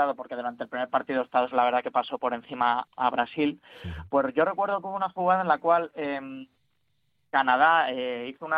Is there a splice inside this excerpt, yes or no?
yes